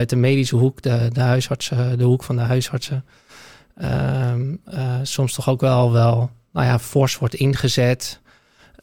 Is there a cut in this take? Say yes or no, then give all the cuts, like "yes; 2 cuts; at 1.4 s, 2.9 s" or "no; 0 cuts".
no; 0 cuts